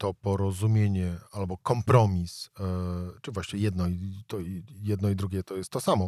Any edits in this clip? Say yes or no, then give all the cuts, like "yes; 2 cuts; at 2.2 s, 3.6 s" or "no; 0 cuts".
no; 0 cuts